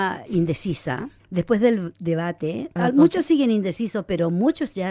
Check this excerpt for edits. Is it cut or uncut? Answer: cut